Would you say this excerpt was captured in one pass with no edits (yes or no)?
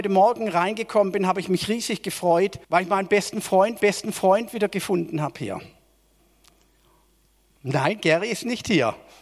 no